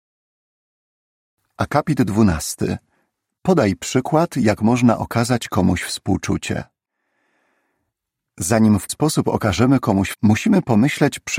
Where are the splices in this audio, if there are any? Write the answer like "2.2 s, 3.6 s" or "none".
8.9 s, 10.1 s

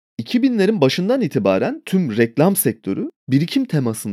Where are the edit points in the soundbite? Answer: none

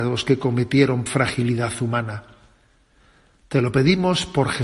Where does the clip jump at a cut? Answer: 1.1 s

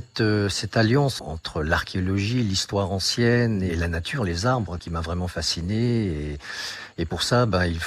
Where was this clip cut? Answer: 1.2 s, 3.7 s, 4.8 s

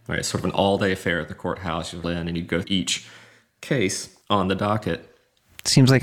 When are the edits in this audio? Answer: 2.0 s, 2.6 s, 4.2 s

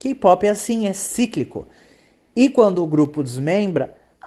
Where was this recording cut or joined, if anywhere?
none

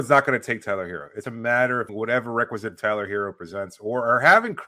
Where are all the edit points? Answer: 1.2 s, 1.9 s, 2.8 s

